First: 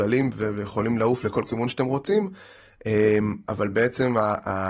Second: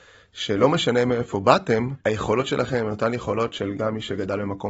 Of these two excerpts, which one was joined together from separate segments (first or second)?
second